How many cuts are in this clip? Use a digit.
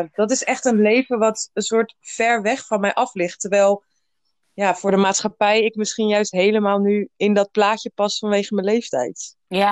0